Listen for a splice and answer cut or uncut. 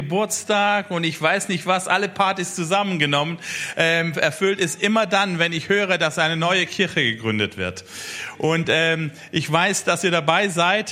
uncut